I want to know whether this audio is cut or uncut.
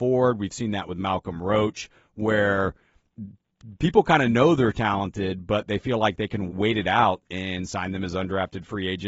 cut